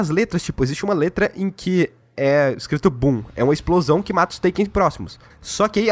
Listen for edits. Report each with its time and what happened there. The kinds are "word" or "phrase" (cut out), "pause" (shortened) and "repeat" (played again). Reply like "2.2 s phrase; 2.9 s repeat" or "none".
none